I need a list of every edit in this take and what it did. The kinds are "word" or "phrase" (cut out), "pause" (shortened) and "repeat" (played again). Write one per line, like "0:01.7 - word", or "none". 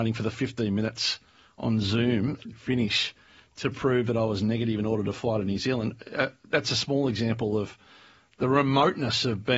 0:02.5 - word